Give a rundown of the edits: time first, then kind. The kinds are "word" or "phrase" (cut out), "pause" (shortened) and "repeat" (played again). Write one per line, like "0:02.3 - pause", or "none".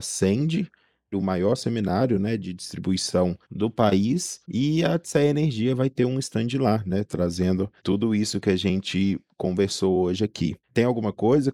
0:03.4 - pause
0:04.4 - pause
0:07.8 - pause
0:10.6 - pause

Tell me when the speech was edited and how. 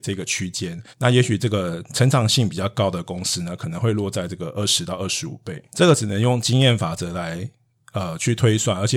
0:00.9 - pause

